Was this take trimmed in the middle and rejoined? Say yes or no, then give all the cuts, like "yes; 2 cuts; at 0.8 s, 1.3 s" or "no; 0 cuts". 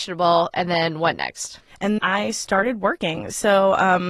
yes; 1 cut; at 2.0 s